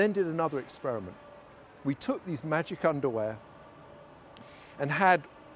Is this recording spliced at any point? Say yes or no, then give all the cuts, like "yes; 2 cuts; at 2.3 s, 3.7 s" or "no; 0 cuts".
no; 0 cuts